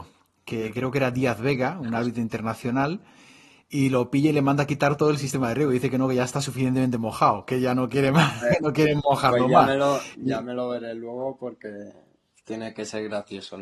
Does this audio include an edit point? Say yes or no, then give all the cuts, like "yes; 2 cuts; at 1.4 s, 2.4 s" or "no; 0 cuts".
no; 0 cuts